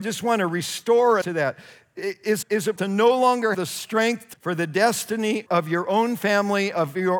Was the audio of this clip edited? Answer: yes; 6 cuts; at 1.2 s, 2.4 s, 2.8 s, 3.5 s, 4.3 s, 5.5 s

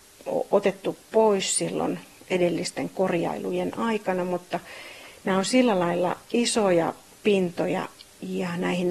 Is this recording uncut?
yes; 0 cuts

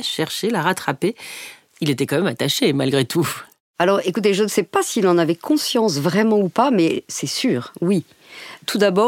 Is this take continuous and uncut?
yes; 0 cuts

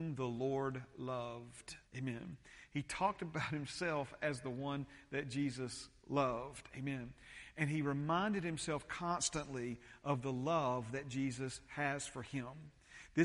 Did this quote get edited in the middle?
yes; 1 cut; at 1.9 s

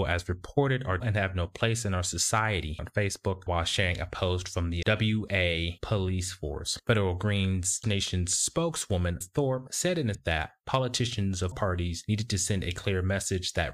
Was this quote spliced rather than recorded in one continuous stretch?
yes; 8 cuts; at 1.0 s, 2.8 s, 3.5 s, 4.8 s, 7.8 s, 9.2 s, 10.1 s, 11.5 s

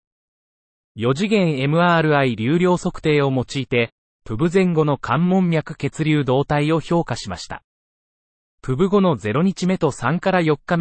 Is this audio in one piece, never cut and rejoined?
yes; 0 cuts

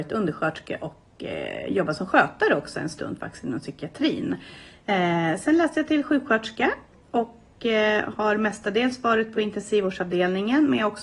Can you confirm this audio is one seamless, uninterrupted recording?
yes; 0 cuts

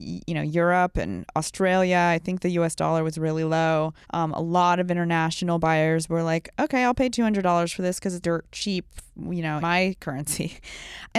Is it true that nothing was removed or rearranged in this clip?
no; 3 cuts; at 4.0 s, 8.2 s, 9.6 s

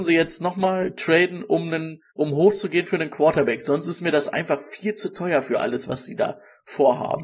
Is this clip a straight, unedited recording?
no; 1 cut; at 2.1 s

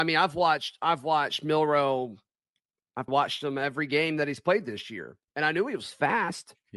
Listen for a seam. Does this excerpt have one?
yes; 2 cuts; at 3.1 s, 5.3 s

